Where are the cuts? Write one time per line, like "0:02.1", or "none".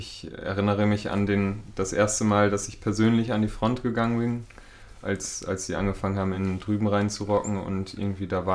none